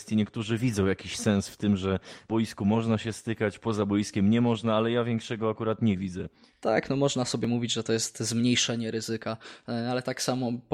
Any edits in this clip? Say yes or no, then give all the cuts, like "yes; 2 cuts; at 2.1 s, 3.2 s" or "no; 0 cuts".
no; 0 cuts